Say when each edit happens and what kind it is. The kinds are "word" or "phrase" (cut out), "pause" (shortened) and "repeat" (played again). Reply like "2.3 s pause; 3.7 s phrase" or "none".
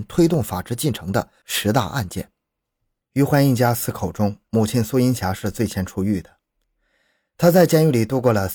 none

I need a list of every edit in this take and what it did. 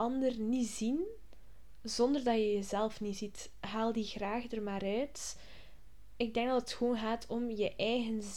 none

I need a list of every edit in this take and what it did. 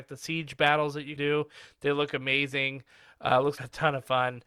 1.2 s word; 3.6 s word

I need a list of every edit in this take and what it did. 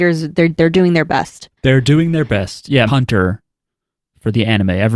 1.6 s pause; 2.9 s word

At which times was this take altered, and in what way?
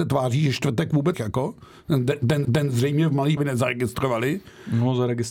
1.1 s word; 2.4 s repeat; 3.4 s word

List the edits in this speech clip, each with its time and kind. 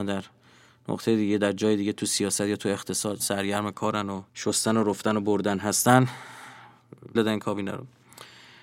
3.2 s word; 4.3 s pause; 7.2 s word

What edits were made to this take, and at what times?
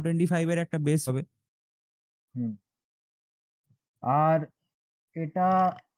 1.1 s word

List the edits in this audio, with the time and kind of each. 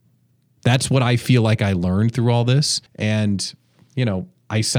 2.9 s pause

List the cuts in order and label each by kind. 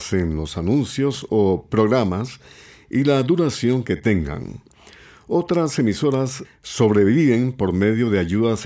none

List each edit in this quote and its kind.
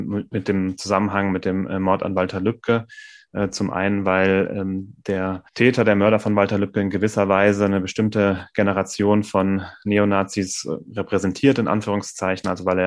5.5 s pause

